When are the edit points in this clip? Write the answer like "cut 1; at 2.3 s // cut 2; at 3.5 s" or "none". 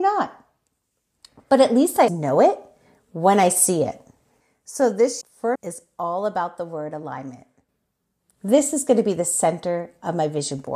cut 1; at 2.1 s // cut 2; at 5.2 s // cut 3; at 5.5 s